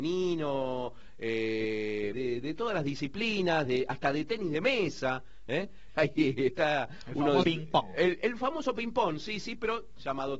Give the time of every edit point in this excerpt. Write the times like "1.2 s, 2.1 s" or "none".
2.1 s, 5.9 s, 7.4 s